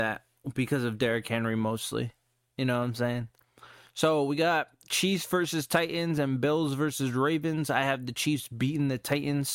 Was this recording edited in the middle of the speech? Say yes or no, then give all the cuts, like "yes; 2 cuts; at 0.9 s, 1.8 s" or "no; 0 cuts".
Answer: no; 0 cuts